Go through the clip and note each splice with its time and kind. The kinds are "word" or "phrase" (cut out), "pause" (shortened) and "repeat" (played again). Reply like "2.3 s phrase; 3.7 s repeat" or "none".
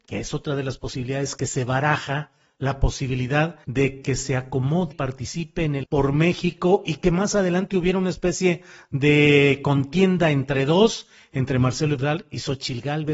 3.6 s pause; 4.9 s word; 5.8 s phrase